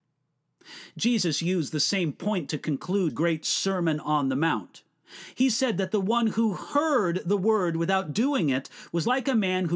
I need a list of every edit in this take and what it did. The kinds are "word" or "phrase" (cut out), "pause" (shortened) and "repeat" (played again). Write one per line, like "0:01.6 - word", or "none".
0:03.1 - word